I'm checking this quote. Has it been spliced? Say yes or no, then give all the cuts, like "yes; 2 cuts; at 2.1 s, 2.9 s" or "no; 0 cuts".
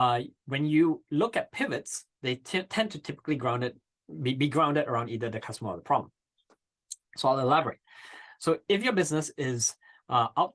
no; 0 cuts